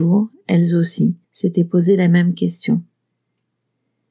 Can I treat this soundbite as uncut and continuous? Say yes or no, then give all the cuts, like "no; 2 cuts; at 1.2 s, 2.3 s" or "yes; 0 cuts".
no; 1 cut; at 1.2 s